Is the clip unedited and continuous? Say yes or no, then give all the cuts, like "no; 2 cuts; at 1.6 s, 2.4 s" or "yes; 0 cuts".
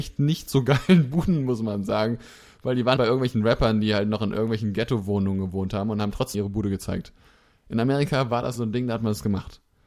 no; 3 cuts; at 3.0 s, 6.3 s, 8.6 s